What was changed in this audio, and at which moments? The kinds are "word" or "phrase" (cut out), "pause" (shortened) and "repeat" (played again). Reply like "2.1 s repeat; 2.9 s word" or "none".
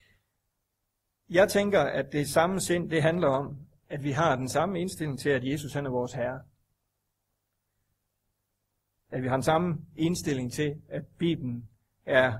none